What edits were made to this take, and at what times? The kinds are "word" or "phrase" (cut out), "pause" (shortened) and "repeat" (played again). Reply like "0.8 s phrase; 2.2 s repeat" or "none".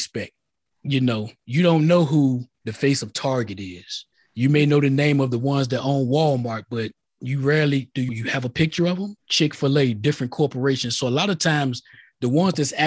2.5 s pause; 4.1 s pause; 8.1 s word; 9.2 s pause